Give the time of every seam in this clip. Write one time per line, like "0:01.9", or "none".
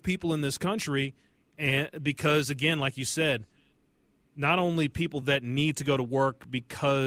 none